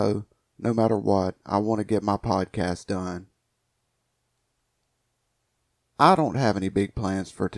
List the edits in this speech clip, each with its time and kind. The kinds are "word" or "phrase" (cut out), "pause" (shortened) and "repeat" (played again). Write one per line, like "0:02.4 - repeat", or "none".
none